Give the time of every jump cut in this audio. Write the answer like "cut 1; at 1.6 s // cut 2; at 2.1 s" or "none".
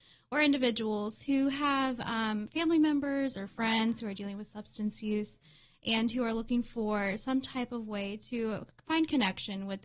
none